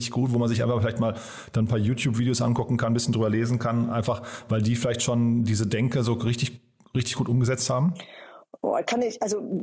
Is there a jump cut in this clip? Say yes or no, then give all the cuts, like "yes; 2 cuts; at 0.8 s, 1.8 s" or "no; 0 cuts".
no; 0 cuts